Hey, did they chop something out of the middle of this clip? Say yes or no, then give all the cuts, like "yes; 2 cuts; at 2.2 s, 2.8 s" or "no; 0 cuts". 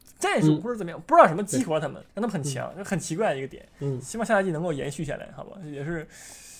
yes; 1 cut; at 2.1 s